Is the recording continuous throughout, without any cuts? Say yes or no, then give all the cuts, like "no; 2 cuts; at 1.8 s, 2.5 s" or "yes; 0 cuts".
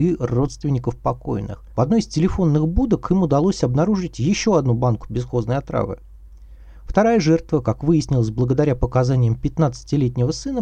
no; 1 cut; at 1.7 s